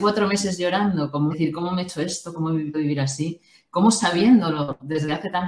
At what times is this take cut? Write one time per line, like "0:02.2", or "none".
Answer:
0:01.3
0:02.7